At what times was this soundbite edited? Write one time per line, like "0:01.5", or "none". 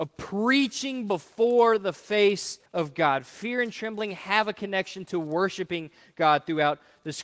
0:02.7